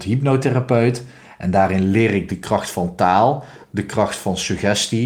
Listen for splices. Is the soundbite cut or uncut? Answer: uncut